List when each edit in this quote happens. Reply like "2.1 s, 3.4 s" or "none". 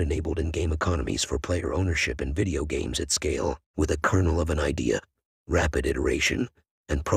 none